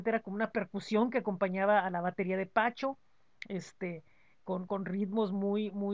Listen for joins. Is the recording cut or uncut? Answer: cut